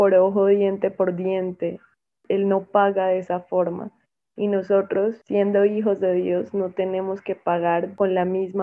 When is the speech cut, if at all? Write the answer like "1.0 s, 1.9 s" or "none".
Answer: none